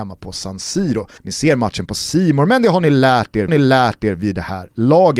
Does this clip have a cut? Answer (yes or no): yes